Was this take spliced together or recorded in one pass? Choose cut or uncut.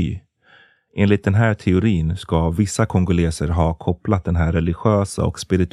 uncut